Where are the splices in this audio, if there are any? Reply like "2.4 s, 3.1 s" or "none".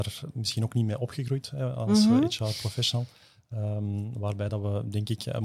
none